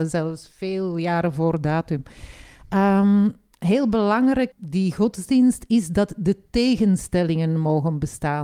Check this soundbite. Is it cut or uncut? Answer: cut